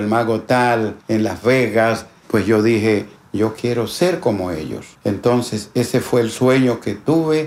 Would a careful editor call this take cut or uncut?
uncut